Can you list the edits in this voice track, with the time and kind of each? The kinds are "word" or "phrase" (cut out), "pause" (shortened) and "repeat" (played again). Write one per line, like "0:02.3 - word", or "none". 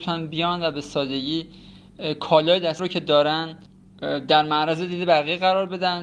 0:02.8 - word